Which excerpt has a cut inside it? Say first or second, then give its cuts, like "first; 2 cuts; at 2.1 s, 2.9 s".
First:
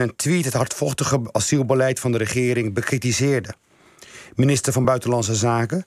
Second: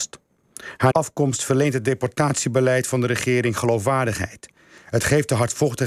second; 1 cut; at 0.9 s